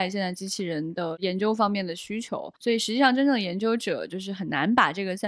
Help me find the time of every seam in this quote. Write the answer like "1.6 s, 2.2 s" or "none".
2.6 s